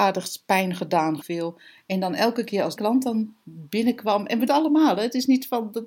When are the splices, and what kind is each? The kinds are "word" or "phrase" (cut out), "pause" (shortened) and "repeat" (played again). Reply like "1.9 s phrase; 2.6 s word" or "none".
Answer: 1.2 s phrase; 2.8 s word; 4.5 s phrase